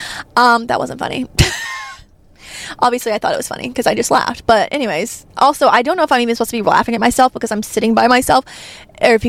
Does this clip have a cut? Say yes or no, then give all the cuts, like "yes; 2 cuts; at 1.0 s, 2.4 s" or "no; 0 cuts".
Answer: yes; 1 cut; at 5.3 s